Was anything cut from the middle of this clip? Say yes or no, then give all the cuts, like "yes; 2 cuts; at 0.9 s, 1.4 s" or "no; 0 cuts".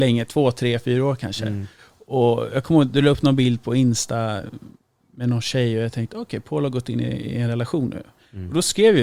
no; 0 cuts